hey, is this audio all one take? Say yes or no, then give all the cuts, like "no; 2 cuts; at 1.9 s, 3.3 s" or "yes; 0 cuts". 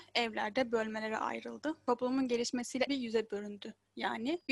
no; 1 cut; at 2.9 s